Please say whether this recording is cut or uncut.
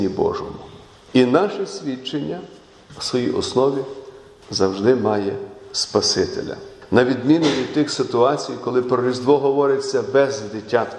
uncut